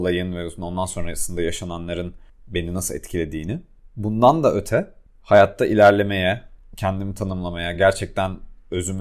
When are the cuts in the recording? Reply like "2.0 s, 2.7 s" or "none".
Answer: none